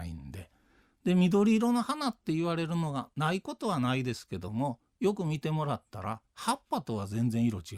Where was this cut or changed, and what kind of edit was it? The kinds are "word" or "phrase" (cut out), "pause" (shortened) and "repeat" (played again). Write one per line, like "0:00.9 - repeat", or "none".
none